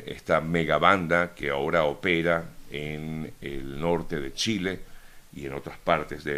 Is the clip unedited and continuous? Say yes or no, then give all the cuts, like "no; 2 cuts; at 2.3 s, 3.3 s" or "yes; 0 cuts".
yes; 0 cuts